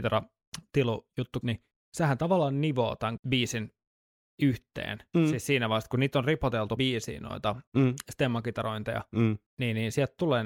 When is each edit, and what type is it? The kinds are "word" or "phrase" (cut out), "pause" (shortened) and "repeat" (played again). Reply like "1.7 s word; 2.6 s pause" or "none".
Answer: 1.4 s word; 3.2 s word; 6.8 s word; 7.7 s pause; 9.5 s pause